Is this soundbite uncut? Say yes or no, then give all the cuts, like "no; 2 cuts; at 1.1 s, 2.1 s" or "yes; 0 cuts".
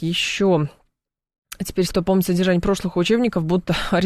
no; 1 cut; at 1.9 s